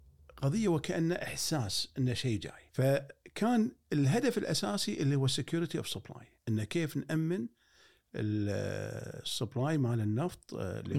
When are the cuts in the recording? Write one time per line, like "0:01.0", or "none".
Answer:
0:02.7
0:06.4